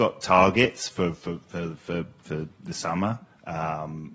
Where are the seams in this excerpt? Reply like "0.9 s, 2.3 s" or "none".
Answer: none

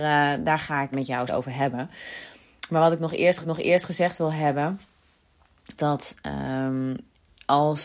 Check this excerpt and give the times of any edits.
0.9 s, 1.3 s, 3.4 s, 5.8 s

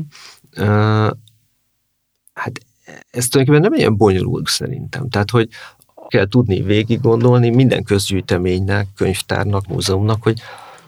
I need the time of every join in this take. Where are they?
3.0 s, 4.5 s, 6.1 s, 9.6 s

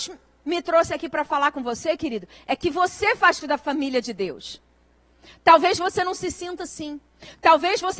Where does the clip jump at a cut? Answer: 3.4 s

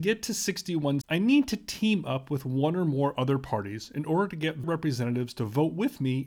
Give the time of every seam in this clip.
1.0 s, 4.6 s

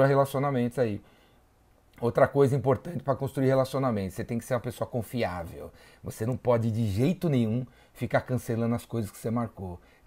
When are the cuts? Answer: none

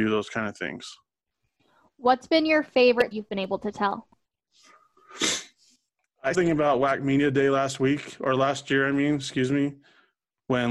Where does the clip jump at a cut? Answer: 3.1 s, 6.3 s

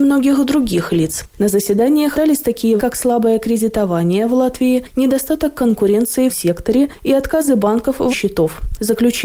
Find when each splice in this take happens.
2.1 s, 2.8 s, 6.3 s, 8.1 s

